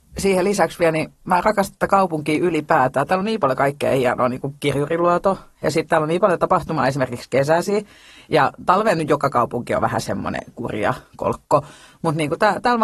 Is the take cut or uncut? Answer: uncut